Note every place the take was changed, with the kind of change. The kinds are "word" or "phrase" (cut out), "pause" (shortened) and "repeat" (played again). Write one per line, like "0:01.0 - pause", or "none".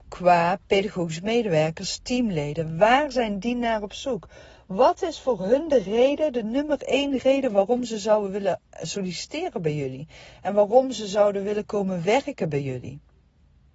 none